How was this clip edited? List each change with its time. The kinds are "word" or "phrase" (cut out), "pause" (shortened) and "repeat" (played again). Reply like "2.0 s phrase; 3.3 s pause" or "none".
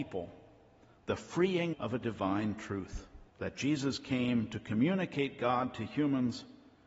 1.7 s word; 3.3 s pause